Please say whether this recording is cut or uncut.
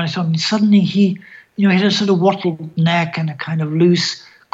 uncut